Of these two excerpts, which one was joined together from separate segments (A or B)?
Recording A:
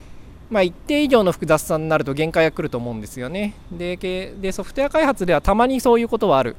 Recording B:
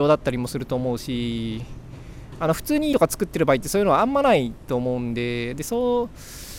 B